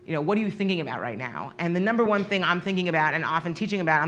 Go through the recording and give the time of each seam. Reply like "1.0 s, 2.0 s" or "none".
none

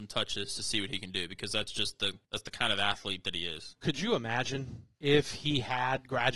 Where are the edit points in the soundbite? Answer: 2.2 s, 4.9 s

